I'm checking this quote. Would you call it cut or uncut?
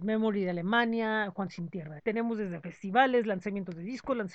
cut